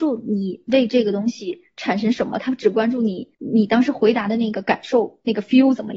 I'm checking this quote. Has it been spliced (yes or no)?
yes